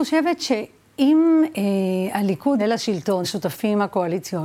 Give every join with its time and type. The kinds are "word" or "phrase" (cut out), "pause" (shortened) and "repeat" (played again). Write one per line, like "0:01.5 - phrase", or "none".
0:02.6 - word
0:03.2 - word